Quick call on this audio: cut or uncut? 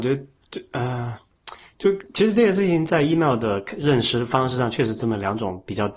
uncut